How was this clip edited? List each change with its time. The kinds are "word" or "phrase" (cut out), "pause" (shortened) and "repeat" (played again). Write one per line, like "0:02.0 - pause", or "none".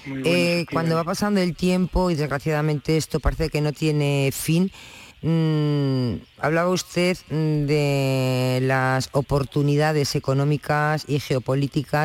0:05.1 - pause